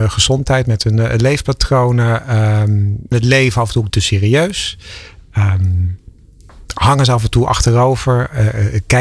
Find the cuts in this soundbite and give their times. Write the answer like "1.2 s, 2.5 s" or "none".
3.1 s, 3.9 s, 6.6 s